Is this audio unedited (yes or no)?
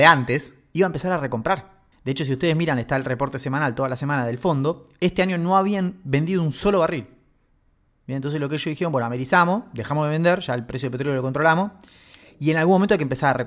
no